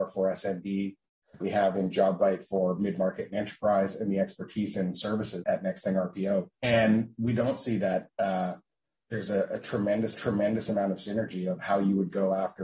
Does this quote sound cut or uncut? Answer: cut